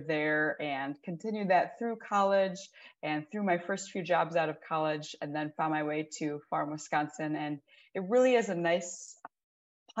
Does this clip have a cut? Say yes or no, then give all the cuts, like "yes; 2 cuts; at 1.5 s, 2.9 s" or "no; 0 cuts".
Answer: no; 0 cuts